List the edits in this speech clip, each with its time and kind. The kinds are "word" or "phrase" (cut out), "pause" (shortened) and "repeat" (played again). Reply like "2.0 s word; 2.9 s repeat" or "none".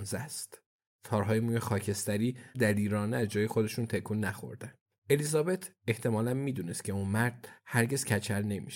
2.5 s word